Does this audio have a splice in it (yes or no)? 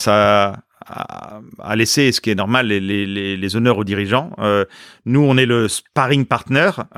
no